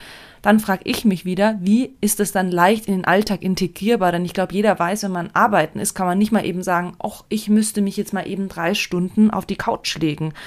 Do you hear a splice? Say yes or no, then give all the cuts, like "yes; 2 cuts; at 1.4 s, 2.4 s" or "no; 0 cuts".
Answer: no; 0 cuts